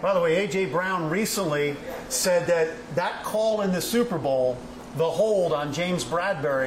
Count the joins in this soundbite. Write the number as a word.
zero